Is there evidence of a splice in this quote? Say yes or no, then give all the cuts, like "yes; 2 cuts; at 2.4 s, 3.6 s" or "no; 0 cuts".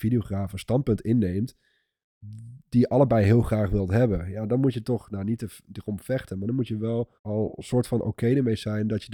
yes; 1 cut; at 7.2 s